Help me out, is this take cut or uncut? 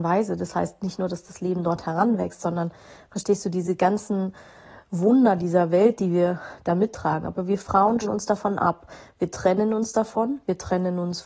cut